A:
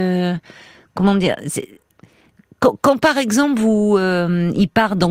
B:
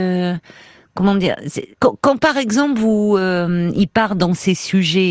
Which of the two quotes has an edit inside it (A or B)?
B